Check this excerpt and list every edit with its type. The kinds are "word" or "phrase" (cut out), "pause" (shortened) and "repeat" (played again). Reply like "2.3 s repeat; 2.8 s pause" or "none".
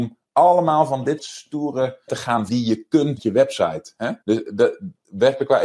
1.2 s word; 2.1 s word; 2.5 s word; 3.2 s phrase; 4.2 s pause